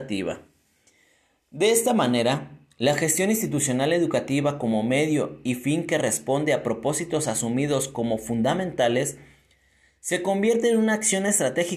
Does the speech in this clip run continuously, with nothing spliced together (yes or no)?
yes